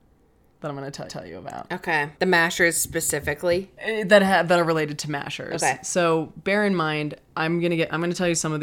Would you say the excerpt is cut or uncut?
cut